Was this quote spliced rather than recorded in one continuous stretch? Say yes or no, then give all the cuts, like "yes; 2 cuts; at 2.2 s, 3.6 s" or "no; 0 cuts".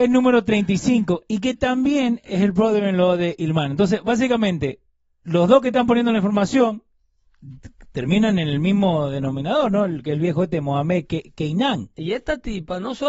no; 0 cuts